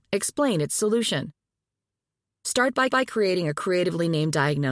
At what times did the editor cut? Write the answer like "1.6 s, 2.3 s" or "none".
2.9 s